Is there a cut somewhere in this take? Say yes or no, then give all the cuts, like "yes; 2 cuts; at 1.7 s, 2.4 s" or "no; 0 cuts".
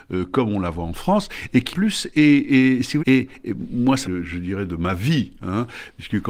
yes; 3 cuts; at 1.7 s, 3.0 s, 4.0 s